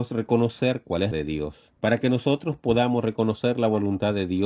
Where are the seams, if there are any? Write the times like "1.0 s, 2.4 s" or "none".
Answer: 1.1 s, 1.8 s